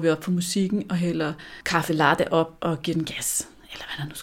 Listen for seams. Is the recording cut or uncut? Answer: uncut